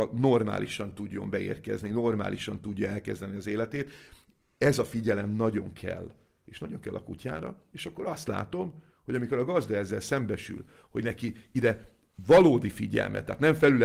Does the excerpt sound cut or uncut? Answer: uncut